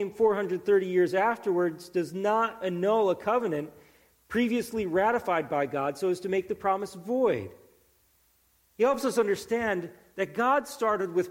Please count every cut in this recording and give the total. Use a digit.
0